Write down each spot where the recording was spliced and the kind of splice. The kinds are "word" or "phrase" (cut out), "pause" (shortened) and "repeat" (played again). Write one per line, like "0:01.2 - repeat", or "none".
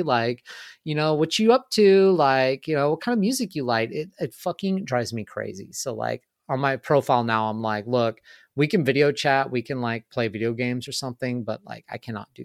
none